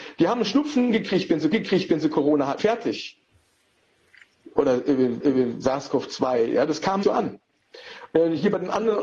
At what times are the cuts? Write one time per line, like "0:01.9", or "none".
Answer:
0:01.5
0:02.6
0:05.2
0:07.0